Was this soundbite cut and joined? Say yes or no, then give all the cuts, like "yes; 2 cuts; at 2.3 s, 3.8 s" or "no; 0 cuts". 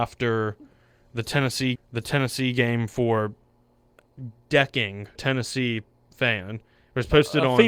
yes; 2 cuts; at 1.8 s, 5.2 s